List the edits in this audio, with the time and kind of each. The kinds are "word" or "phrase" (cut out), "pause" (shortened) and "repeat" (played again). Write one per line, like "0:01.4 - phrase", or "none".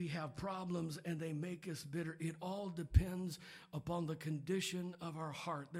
none